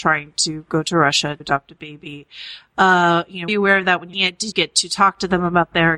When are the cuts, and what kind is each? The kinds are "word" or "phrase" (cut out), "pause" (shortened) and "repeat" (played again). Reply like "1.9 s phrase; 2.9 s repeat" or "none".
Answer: 1.4 s word; 3.5 s word; 4.1 s word; 4.5 s word